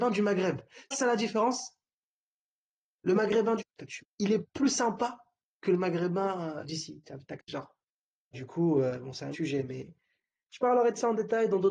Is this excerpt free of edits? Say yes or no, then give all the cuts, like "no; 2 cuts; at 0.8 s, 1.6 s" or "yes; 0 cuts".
no; 8 cuts; at 0.9 s, 3.6 s, 4.0 s, 4.4 s, 6.6 s, 7.4 s, 8.3 s, 9.3 s